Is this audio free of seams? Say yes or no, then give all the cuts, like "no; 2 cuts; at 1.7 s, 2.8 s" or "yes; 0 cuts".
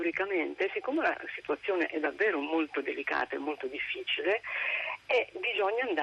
yes; 0 cuts